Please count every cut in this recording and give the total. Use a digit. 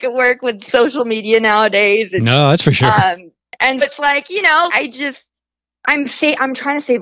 2